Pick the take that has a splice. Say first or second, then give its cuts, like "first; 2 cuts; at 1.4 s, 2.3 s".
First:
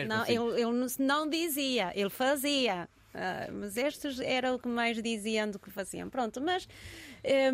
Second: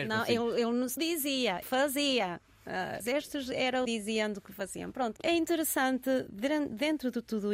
second; 5 cuts; at 1.0 s, 1.6 s, 3.0 s, 3.9 s, 5.2 s